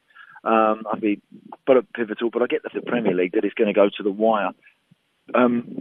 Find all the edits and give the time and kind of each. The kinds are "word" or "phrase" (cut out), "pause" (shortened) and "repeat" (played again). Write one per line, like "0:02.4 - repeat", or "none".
0:01.0 - phrase
0:01.9 - word
0:02.7 - phrase